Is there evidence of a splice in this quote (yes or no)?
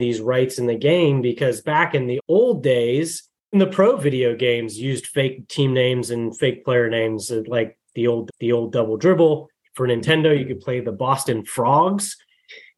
yes